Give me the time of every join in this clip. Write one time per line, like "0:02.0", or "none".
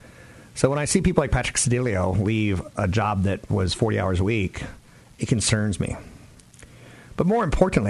none